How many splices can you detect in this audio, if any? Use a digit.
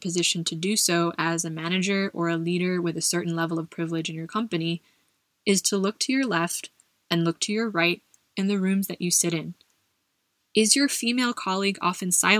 0